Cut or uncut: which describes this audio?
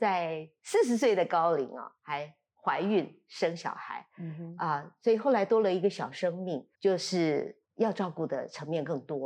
cut